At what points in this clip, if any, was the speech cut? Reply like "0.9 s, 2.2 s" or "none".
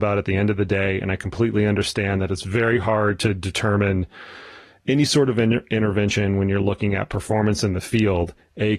none